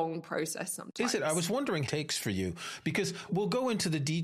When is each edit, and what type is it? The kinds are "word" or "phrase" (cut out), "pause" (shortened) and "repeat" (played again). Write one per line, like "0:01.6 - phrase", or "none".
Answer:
0:01.9 - phrase
0:03.3 - word